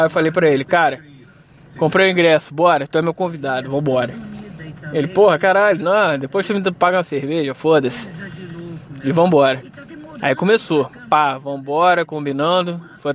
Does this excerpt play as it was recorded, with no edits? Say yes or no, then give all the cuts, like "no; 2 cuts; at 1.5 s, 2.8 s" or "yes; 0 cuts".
yes; 0 cuts